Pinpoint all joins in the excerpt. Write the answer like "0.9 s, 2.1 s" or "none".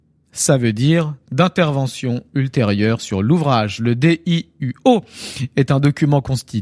1.2 s